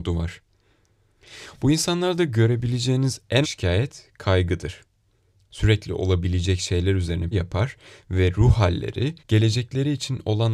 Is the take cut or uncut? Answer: cut